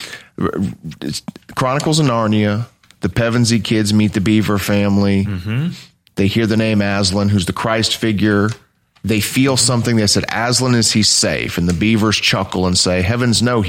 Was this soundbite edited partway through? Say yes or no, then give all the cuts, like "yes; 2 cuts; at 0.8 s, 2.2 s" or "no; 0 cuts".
no; 0 cuts